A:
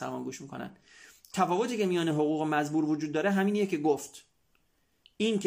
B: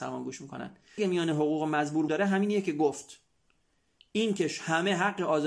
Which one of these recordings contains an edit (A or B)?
B